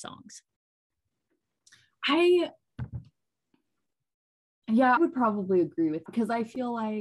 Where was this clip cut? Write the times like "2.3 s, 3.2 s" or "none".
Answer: 5.0 s, 6.1 s